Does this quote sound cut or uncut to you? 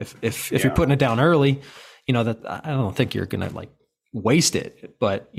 uncut